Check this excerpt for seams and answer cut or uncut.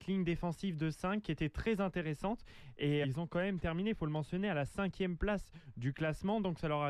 cut